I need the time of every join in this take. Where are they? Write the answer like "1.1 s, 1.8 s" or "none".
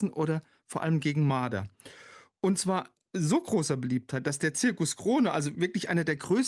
none